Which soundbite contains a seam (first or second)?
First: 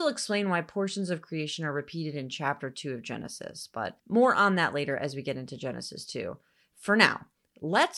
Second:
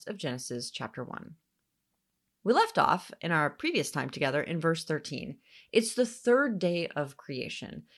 first